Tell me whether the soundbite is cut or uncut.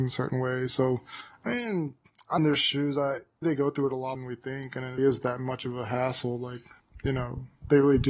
cut